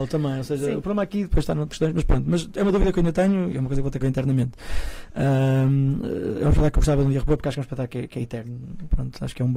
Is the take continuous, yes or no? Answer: no